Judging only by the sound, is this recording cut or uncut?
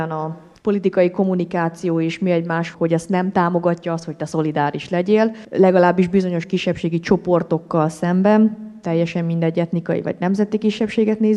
uncut